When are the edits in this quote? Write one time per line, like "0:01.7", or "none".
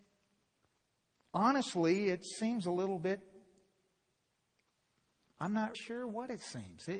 0:05.7